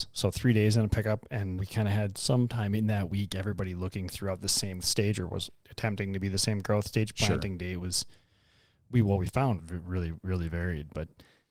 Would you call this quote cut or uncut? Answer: cut